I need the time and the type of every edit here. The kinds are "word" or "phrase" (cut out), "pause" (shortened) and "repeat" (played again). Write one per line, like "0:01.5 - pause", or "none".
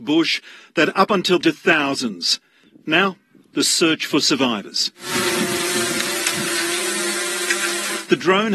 0:01.4 - phrase